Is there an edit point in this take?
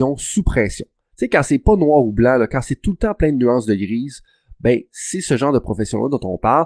no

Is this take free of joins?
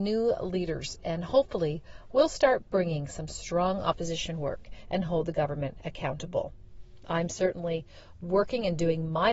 yes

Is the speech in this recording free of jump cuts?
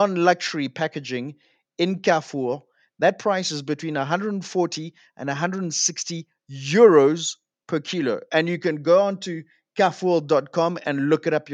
yes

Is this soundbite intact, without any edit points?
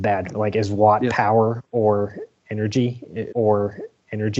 no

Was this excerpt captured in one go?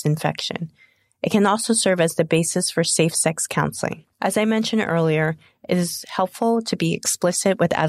no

